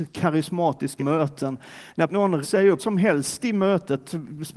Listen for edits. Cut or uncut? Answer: cut